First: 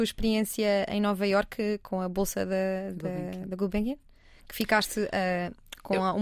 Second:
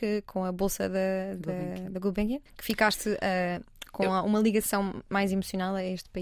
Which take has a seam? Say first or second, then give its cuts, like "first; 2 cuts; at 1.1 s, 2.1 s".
second; 1 cut; at 2.5 s